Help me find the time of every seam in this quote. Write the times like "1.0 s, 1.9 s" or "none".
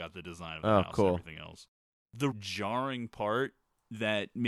2.3 s